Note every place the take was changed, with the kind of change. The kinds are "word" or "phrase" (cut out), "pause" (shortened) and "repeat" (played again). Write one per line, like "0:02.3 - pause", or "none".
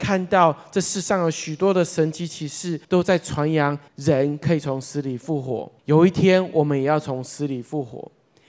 0:02.8 - pause
0:03.9 - pause
0:05.8 - pause

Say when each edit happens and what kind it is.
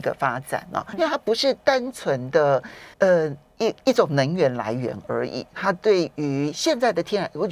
0:00.9 - word
0:02.9 - pause

